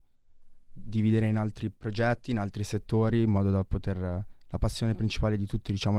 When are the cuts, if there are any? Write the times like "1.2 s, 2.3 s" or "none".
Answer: 1.8 s

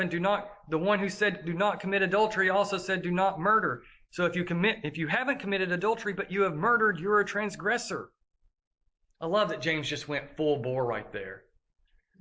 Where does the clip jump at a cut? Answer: none

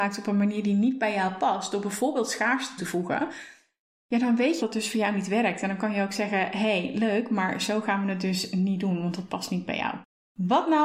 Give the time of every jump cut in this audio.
2.8 s, 4.6 s

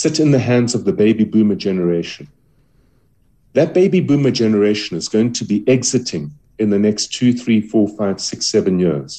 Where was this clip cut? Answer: none

